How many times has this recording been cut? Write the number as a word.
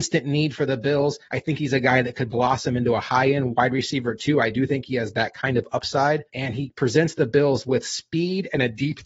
two